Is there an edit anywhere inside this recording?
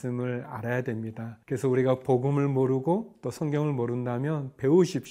yes; 1 cut; at 1.4 s

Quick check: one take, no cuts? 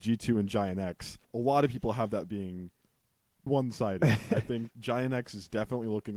no; 3 cuts; at 1.2 s, 3.5 s, 4.7 s

